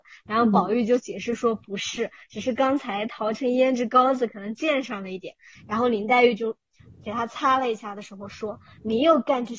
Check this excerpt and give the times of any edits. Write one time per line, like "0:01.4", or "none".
none